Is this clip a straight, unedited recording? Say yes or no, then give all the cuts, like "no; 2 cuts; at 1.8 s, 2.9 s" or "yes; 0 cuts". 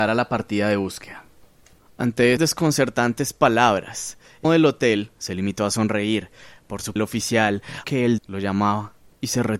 no; 5 cuts; at 2.4 s, 4.4 s, 7.0 s, 7.8 s, 8.2 s